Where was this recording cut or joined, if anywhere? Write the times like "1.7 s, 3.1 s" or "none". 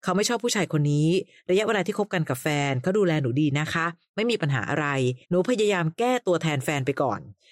5.2 s